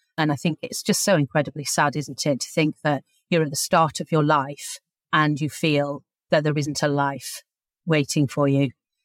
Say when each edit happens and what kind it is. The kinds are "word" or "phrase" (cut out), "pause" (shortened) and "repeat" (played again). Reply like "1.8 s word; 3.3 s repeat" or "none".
4.9 s pause